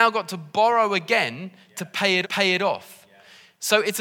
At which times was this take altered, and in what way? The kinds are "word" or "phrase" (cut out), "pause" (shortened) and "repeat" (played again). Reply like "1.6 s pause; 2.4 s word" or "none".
2.2 s repeat